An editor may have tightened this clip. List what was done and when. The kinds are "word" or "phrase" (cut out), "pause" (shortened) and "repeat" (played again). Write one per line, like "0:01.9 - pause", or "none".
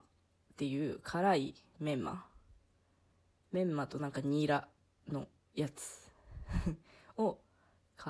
none